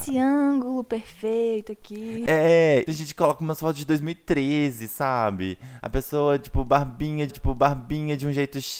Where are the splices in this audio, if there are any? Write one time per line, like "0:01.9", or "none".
0:02.9
0:07.3